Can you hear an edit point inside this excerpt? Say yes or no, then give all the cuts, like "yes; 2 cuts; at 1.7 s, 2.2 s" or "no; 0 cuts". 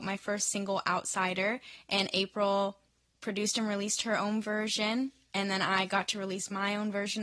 no; 0 cuts